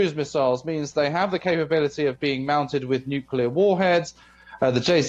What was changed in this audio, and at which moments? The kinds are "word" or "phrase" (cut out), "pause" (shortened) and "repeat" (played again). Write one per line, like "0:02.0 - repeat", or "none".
none

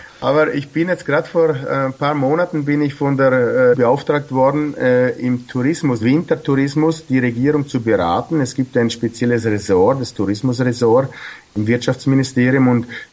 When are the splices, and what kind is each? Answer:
0:03.7 - phrase
0:06.0 - word

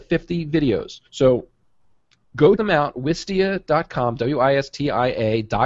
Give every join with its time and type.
0:01.1 - pause
0:02.6 - word

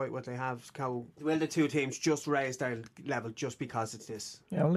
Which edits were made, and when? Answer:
0:01.1 - pause

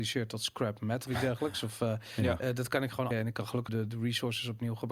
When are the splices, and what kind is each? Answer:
0:01.1 - word
0:03.1 - word
0:03.7 - word

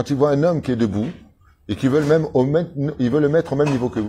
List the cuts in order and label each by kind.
none

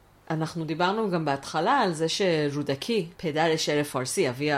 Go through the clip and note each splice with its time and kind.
0:03.2 - pause

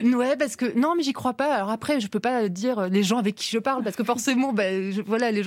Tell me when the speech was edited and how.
none

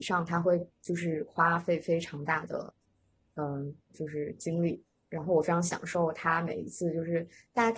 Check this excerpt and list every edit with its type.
none

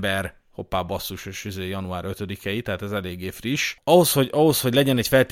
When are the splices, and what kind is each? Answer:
none

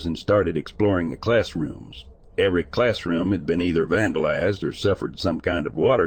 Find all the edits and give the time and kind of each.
none

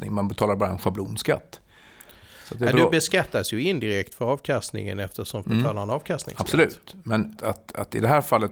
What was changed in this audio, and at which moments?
0:05.4 - word
0:07.4 - word

